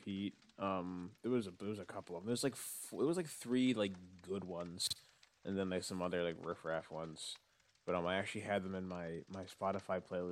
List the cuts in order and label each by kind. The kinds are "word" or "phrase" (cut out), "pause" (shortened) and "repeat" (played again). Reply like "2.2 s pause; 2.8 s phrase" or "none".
none